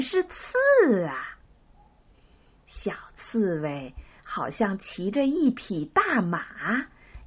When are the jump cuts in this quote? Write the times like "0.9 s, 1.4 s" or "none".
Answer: none